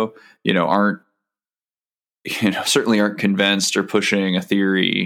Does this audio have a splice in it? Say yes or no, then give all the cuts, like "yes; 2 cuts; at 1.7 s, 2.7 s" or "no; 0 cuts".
no; 0 cuts